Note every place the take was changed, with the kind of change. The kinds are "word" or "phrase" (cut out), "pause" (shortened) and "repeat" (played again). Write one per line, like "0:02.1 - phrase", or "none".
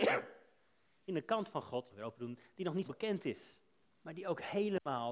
0:01.1 - word
0:01.9 - phrase
0:02.8 - word
0:03.8 - pause